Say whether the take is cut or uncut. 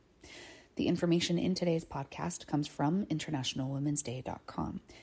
uncut